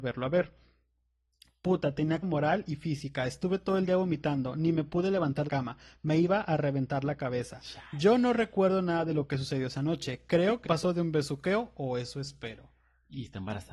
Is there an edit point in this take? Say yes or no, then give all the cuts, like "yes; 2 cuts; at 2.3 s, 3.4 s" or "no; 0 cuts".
yes; 3 cuts; at 2.2 s, 5.5 s, 10.6 s